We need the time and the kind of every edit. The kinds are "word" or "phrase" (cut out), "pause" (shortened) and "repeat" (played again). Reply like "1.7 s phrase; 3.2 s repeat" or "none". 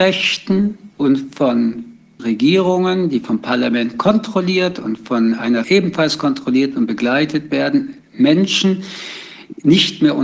0.9 s pause; 2.2 s word; 5.6 s word